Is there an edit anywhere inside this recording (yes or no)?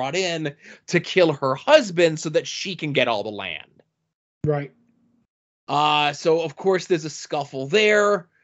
no